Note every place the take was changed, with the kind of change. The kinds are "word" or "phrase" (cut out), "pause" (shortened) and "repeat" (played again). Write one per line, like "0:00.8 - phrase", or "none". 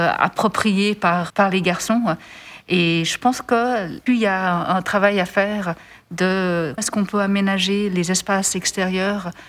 0:01.3 - word
0:04.1 - word
0:06.8 - word